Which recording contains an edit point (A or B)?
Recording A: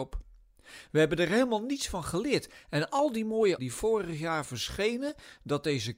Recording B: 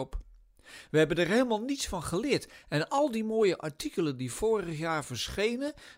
A